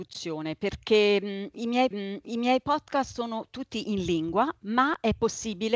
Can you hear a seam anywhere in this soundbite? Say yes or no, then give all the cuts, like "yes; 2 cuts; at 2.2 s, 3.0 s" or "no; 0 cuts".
yes; 1 cut; at 1.9 s